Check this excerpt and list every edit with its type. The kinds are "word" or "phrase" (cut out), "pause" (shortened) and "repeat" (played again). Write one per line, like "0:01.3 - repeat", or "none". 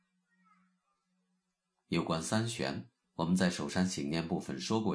0:03.0 - pause